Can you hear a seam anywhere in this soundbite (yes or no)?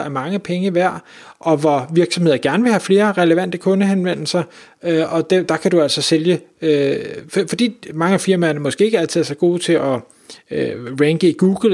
no